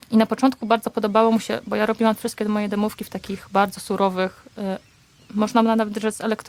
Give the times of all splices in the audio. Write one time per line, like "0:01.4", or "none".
none